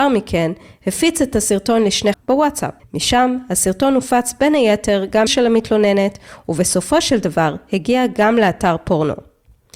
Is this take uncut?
no; 3 cuts; at 2.1 s, 2.8 s, 5.3 s

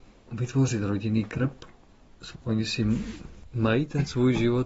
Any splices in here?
yes; 1 cut; at 2.3 s

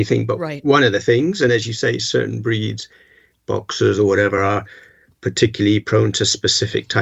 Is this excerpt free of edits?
yes; 0 cuts

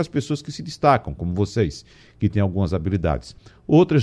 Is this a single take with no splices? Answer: yes; 0 cuts

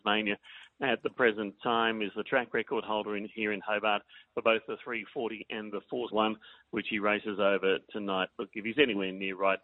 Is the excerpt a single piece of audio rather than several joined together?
no; 1 cut; at 6.1 s

